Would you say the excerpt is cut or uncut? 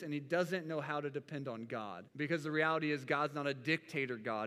cut